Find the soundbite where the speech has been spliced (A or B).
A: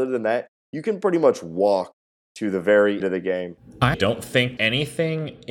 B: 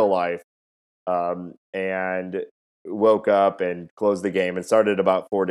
A